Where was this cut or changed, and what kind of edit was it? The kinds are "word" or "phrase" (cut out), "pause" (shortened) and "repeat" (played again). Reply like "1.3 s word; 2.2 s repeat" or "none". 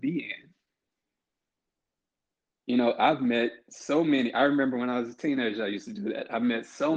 none